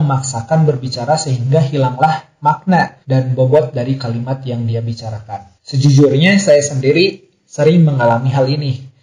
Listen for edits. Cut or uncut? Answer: cut